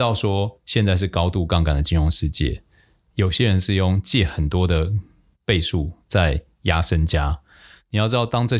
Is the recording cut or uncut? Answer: uncut